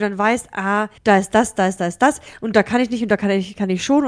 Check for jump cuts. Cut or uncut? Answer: cut